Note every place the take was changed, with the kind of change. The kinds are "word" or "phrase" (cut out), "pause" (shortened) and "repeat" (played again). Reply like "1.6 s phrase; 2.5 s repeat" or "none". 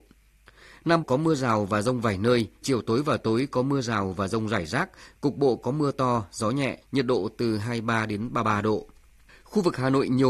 1.0 s word; 2.6 s word; 6.8 s pause